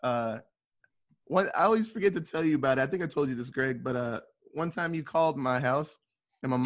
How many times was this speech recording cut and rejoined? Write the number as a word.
zero